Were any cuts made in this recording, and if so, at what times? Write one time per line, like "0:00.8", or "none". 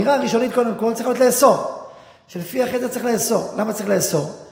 none